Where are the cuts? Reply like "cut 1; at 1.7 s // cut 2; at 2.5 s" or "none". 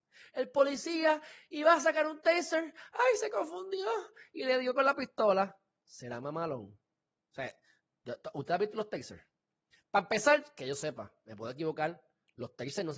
none